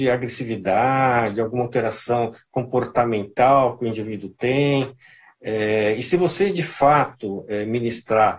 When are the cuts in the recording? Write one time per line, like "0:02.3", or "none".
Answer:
none